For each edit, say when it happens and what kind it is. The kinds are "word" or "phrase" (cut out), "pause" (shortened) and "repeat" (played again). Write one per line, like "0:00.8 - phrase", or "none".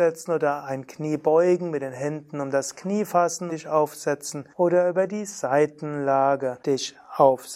0:03.5 - word
0:04.5 - pause
0:06.6 - pause